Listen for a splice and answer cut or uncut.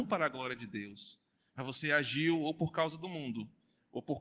uncut